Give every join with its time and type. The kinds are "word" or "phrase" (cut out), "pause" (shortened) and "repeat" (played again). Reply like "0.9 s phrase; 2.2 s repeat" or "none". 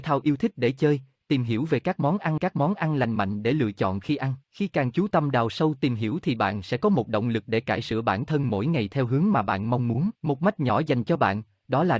2.4 s repeat; 4.4 s pause; 10.2 s pause